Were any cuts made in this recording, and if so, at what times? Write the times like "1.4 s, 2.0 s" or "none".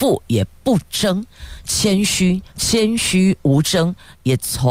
2.5 s

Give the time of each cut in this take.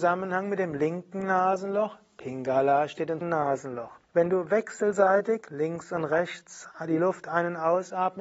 3.2 s, 4.0 s

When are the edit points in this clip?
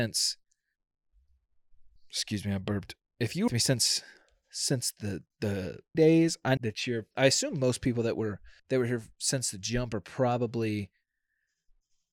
2.0 s, 3.5 s, 5.9 s, 6.6 s, 7.1 s, 8.6 s

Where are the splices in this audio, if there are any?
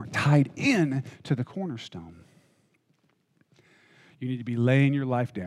none

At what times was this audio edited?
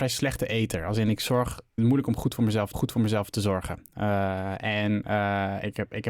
1.8 s, 2.7 s

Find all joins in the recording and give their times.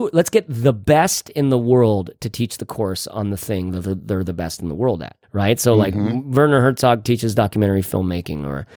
5.2 s

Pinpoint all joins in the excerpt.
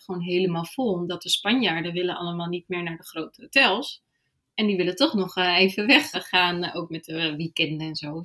6.1 s

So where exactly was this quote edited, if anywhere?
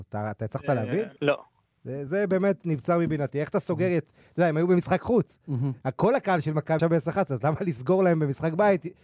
1.2 s, 2.1 s, 6.8 s

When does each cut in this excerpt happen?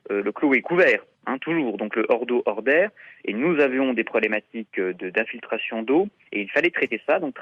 none

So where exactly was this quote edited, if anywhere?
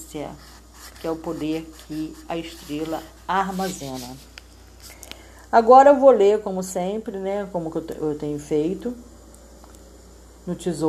none

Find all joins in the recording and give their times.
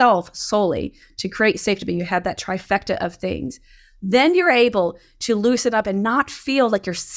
none

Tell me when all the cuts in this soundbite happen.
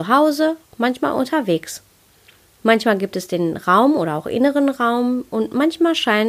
none

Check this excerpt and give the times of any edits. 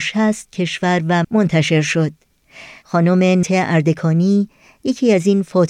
1.2 s, 3.4 s

